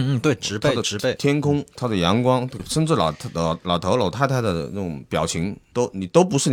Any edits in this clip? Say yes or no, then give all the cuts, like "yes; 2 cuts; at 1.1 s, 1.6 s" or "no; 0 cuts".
yes; 1 cut; at 2.6 s